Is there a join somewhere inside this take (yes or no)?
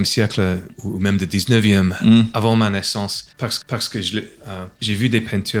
yes